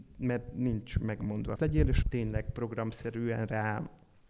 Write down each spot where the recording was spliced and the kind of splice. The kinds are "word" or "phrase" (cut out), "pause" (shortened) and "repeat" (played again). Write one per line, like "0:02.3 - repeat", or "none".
0:01.6 - phrase
0:02.0 - word